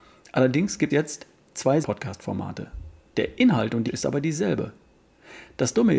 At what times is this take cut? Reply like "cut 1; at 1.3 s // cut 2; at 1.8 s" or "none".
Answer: cut 1; at 0.9 s // cut 2; at 1.8 s // cut 3; at 3.9 s